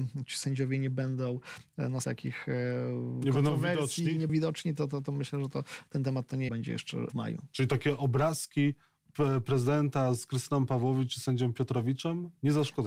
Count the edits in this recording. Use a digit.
4